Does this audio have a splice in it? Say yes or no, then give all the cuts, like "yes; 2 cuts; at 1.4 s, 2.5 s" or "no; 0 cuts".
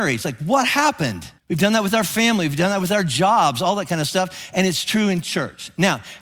yes; 1 cut; at 1.4 s